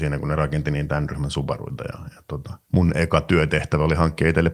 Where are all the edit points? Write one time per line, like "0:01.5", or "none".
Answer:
0:02.6